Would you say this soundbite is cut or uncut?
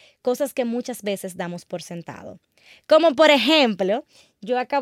uncut